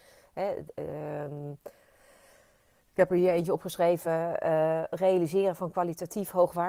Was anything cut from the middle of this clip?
no; 0 cuts

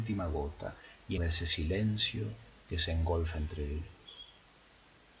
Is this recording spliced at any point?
yes; 1 cut; at 1.2 s

